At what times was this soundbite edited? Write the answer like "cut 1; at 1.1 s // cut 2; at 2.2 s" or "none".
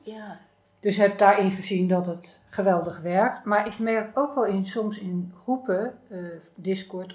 cut 1; at 2.5 s